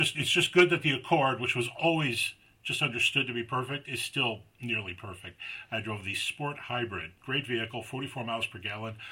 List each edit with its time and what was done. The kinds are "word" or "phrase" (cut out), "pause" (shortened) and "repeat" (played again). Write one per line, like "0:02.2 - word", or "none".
0:07.2 - pause